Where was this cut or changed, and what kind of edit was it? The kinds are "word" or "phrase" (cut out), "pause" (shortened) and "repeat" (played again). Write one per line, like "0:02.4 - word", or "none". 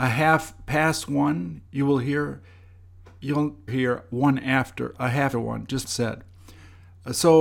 0:01.7 - pause
0:03.7 - phrase
0:05.0 - word
0:05.3 - word
0:05.8 - word